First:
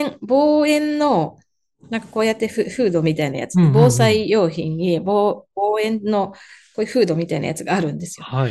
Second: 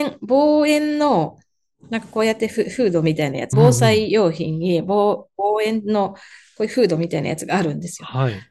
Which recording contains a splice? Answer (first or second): second